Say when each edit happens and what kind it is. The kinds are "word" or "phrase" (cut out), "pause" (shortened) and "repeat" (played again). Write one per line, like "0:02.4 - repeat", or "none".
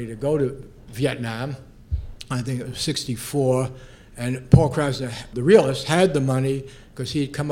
0:05.3 - word